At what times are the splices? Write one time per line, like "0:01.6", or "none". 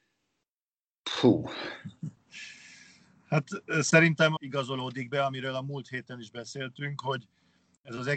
0:04.4